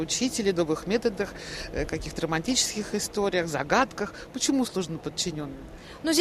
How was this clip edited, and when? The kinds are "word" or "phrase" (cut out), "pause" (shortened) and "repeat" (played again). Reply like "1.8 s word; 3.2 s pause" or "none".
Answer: none